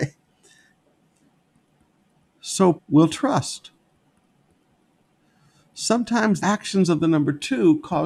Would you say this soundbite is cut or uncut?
cut